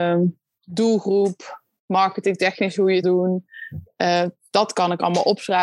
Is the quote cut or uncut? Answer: cut